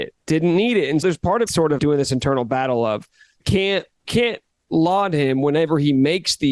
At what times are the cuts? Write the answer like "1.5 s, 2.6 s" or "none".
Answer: 1.0 s, 1.5 s, 1.8 s, 3.4 s, 4.0 s, 4.7 s